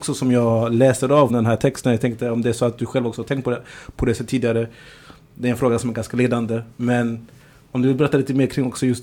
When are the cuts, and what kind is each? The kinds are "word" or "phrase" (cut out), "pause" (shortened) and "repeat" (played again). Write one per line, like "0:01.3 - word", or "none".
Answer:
0:01.3 - word